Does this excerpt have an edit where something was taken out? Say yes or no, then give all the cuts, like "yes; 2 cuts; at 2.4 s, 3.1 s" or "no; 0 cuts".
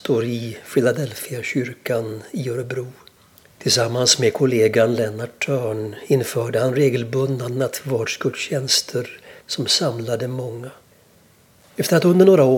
yes; 3 cuts; at 3.2 s, 9.4 s, 10.9 s